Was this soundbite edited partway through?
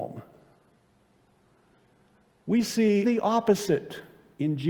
yes; 1 cut; at 3.0 s

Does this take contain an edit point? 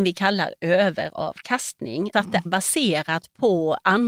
yes; 2 cuts; at 2.1 s, 2.5 s

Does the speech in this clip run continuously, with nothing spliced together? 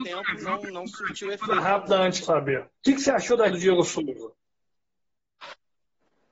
no; 3 cuts; at 2.2 s, 2.8 s, 3.5 s

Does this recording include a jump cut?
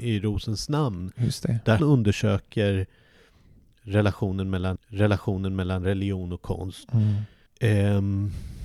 yes; 3 cuts; at 1.8 s, 4.8 s, 7.5 s

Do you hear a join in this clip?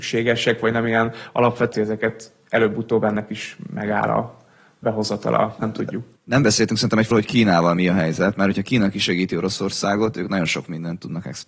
yes; 3 cuts; at 1.7 s, 5.6 s, 7.1 s

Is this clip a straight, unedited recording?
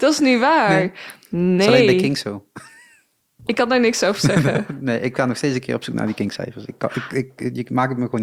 yes; 0 cuts

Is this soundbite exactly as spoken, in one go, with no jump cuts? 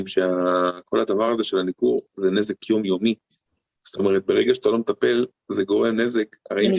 yes; 0 cuts

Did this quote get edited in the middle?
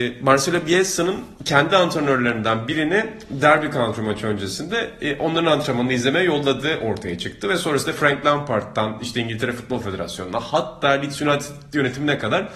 yes; 1 cut; at 1.4 s

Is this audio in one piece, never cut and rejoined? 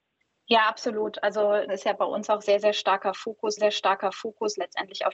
no; 2 cuts; at 1.7 s, 3.6 s

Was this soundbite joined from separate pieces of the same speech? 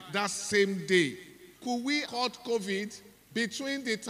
yes; 3 cuts; at 1.6 s, 2.0 s, 3.1 s

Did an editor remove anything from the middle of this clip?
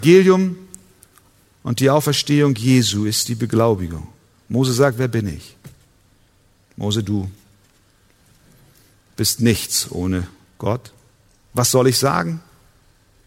no; 0 cuts

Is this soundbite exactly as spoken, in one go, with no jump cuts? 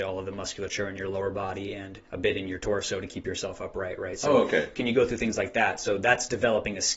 no; 1 cut; at 2.0 s

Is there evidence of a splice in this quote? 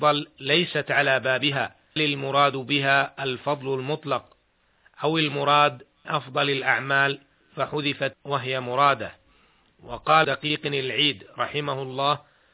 yes; 4 cuts; at 2.0 s, 6.0 s, 8.1 s, 10.2 s

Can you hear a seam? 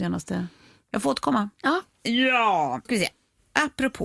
yes; 1 cut; at 2.9 s

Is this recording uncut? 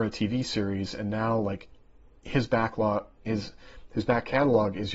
yes; 0 cuts

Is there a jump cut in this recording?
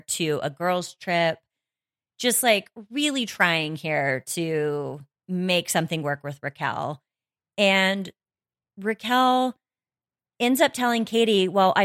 yes; 1 cut; at 5.2 s

